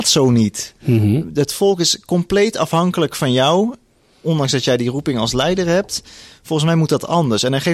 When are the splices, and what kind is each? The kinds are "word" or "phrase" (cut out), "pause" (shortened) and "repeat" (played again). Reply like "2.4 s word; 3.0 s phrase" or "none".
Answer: none